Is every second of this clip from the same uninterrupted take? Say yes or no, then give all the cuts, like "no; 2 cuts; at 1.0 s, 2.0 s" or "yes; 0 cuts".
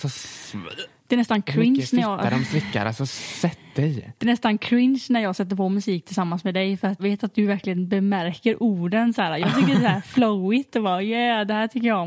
no; 1 cut; at 7.0 s